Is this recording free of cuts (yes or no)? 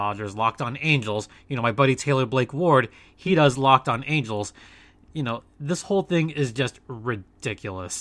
yes